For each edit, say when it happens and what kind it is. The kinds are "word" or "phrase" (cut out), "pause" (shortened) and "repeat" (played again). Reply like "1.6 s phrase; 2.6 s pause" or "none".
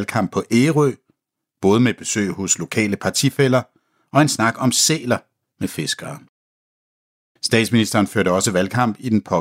none